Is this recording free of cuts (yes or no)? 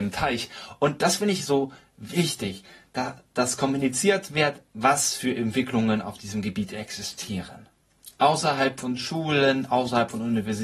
yes